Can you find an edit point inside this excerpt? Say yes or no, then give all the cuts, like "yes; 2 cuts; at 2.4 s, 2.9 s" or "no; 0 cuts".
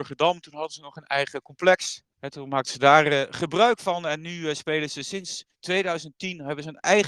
yes; 2 cuts; at 2.1 s, 5.5 s